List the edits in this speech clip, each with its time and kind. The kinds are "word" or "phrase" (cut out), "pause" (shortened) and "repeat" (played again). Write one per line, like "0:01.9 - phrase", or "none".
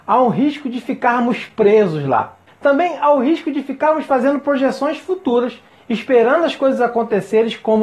none